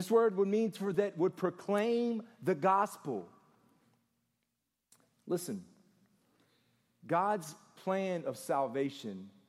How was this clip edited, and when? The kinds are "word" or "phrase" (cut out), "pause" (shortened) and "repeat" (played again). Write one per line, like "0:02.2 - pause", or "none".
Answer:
0:00.9 - word